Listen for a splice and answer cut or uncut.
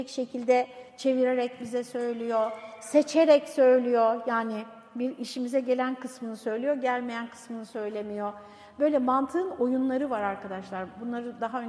uncut